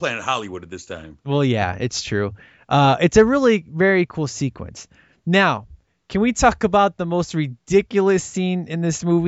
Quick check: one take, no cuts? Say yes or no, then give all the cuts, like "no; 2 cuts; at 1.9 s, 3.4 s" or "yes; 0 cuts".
yes; 0 cuts